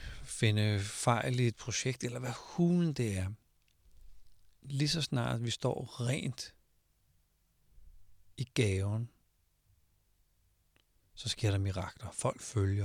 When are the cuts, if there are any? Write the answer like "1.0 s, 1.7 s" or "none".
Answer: none